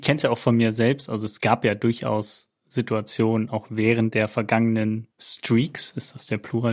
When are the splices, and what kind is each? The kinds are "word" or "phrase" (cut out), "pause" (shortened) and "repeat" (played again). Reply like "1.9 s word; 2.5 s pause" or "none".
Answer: 5.1 s pause